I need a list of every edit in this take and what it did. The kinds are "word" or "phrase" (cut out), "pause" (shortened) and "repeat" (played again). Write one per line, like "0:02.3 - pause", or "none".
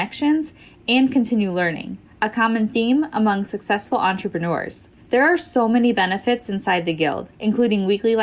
0:07.3 - pause